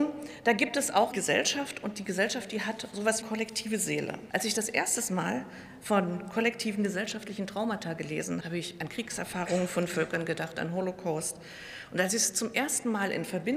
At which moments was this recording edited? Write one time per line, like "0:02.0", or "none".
0:01.1
0:03.2
0:04.3
0:08.4